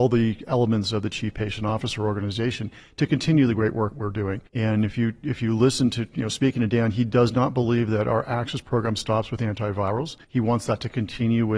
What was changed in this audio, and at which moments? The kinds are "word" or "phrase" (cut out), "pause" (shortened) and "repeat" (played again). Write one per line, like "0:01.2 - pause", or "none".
0:03.9 - word
0:04.5 - pause
0:10.2 - pause